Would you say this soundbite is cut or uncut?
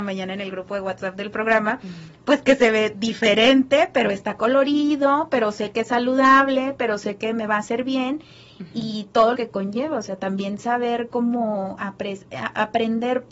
cut